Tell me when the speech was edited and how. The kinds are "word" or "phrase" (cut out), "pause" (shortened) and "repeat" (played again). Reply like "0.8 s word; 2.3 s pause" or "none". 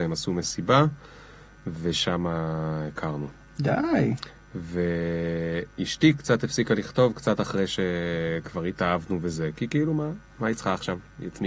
none